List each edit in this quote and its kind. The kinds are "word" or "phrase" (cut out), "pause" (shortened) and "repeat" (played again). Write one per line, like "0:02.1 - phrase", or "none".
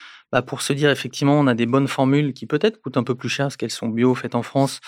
none